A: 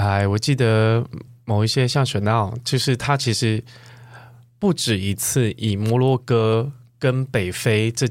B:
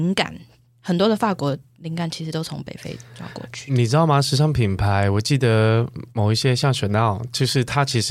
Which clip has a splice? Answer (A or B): B